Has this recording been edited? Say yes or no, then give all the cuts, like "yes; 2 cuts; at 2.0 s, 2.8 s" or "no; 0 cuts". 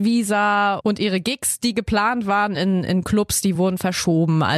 no; 0 cuts